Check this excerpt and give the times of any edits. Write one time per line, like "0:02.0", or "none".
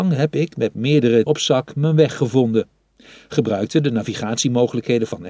0:01.3